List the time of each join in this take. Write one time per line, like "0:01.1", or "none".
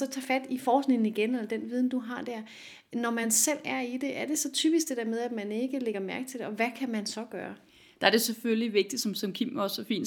none